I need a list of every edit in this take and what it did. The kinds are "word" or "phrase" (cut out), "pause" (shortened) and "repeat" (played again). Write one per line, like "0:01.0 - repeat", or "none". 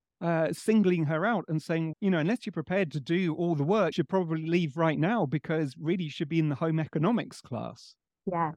0:01.9 - word
0:03.9 - word